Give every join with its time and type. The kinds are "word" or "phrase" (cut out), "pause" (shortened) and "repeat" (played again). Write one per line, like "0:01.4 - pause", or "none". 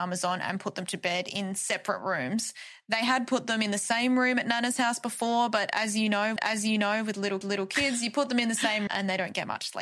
0:06.4 - repeat
0:07.4 - repeat
0:08.9 - word